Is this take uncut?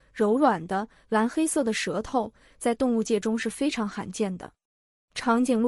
yes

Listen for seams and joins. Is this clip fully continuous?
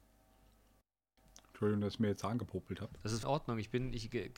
no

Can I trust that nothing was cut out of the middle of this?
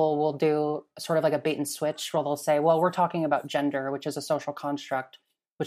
yes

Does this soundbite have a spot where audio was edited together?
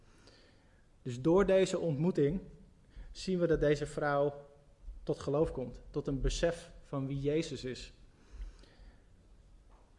no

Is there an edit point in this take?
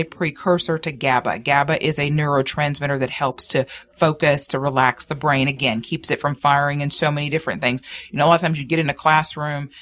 no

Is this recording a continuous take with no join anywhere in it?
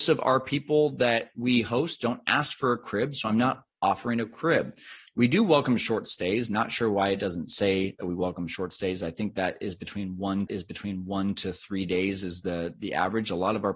no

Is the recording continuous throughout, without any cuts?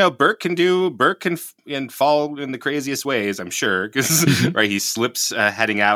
yes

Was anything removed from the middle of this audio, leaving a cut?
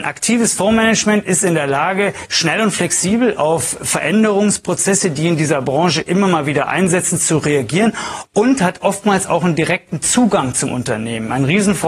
no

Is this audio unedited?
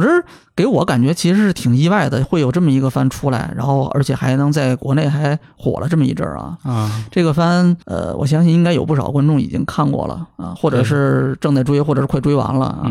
no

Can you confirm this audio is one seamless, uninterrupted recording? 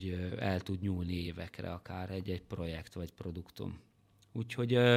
yes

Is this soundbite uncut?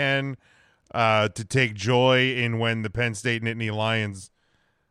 yes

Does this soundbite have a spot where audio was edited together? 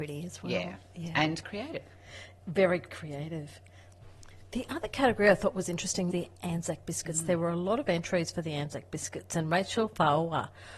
yes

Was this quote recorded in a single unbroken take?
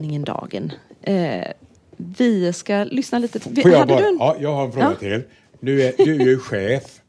yes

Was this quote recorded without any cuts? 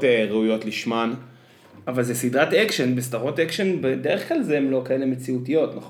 yes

